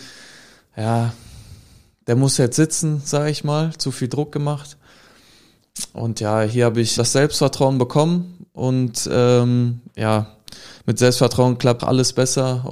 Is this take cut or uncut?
cut